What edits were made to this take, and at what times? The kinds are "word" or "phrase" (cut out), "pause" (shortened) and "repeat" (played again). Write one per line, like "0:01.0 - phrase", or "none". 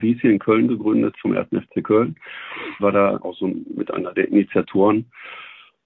0:02.8 - word
0:03.2 - word